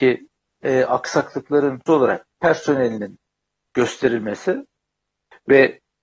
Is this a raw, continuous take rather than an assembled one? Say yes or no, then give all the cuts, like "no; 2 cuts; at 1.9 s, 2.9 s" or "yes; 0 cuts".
no; 2 cuts; at 1.9 s, 2.4 s